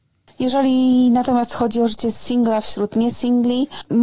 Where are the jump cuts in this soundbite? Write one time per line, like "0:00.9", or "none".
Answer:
none